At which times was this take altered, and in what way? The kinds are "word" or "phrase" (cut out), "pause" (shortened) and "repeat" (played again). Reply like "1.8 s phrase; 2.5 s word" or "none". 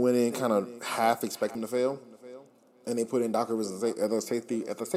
1.5 s word